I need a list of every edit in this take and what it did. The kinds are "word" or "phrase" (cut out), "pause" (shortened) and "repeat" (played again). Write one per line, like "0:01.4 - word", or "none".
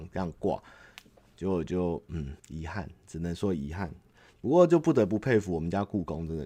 0:02.4 - pause